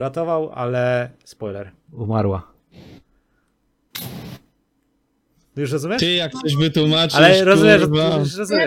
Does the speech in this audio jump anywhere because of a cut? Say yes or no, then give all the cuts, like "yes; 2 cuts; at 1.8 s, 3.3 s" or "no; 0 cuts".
no; 0 cuts